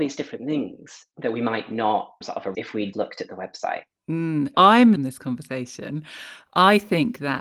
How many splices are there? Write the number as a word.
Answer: four